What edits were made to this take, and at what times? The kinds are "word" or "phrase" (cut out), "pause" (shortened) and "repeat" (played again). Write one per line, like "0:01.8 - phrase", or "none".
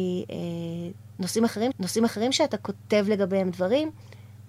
0:01.7 - repeat